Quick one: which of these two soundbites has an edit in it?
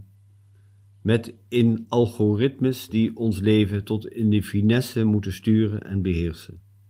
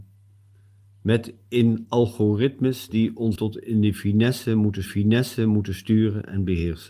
second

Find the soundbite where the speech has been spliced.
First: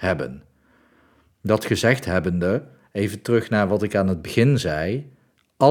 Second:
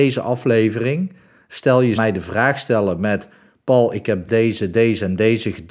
second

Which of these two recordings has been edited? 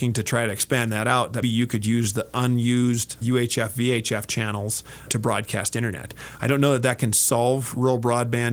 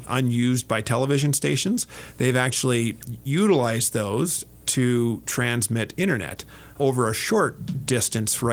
first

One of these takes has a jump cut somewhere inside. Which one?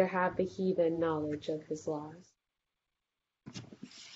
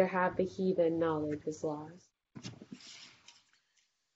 second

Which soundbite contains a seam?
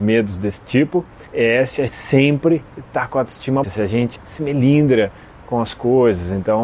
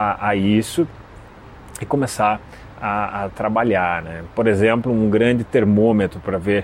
first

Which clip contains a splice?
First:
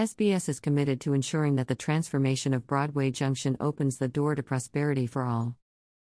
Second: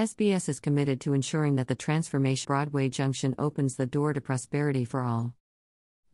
second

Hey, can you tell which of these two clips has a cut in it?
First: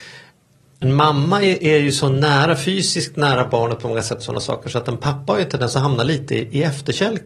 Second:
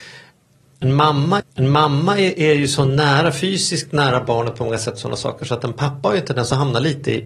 second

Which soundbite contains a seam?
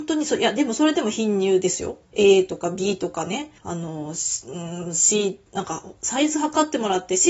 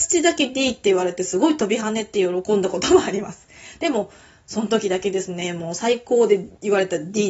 first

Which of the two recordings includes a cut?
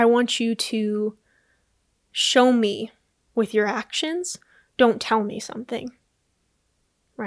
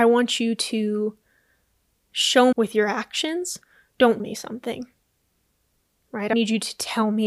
second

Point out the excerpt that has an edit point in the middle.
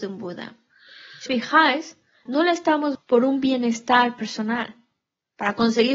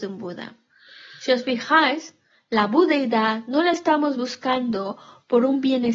first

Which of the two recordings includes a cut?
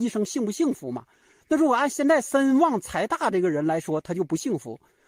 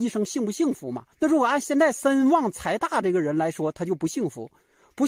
second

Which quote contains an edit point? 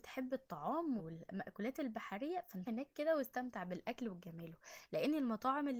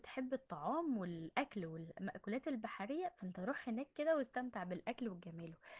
first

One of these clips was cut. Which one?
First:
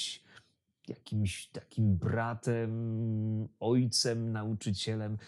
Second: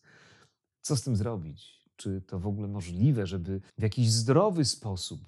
second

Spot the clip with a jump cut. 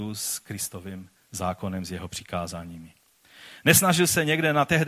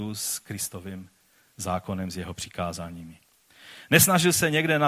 first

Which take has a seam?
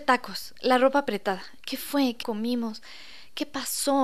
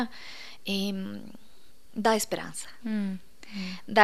first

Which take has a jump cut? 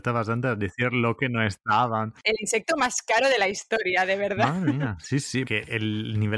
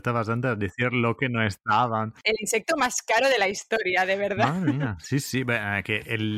first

